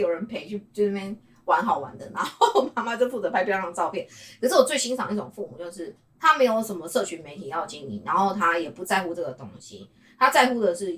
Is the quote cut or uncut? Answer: uncut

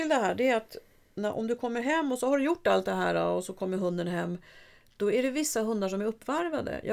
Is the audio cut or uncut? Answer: uncut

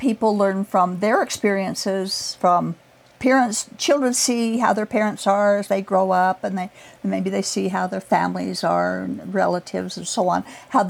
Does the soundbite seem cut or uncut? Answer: uncut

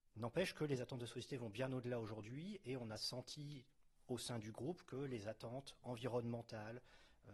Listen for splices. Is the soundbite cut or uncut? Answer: uncut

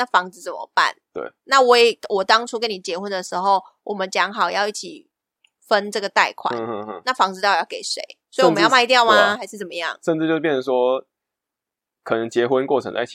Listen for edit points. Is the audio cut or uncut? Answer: uncut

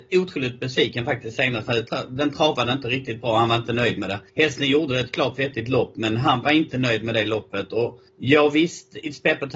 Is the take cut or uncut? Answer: cut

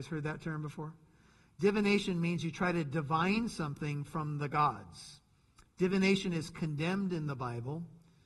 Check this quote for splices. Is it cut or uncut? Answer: uncut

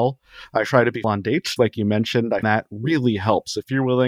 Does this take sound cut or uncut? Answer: cut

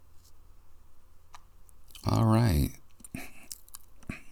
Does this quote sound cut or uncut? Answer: uncut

